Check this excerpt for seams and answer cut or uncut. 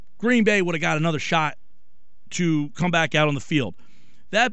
uncut